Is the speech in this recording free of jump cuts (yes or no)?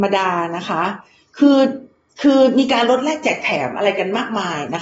yes